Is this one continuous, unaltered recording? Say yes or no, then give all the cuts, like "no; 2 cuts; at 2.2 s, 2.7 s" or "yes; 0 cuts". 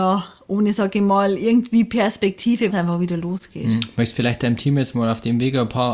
no; 1 cut; at 2.7 s